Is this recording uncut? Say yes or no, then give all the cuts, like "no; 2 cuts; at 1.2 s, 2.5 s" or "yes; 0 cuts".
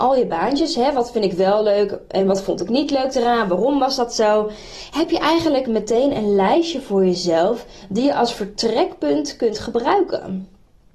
yes; 0 cuts